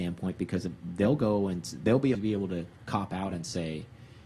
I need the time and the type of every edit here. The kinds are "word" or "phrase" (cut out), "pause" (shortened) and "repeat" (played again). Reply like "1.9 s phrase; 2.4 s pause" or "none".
2.1 s word; 2.8 s pause